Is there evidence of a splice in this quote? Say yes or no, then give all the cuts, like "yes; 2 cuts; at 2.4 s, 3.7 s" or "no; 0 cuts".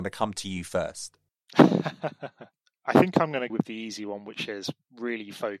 yes; 1 cut; at 3.5 s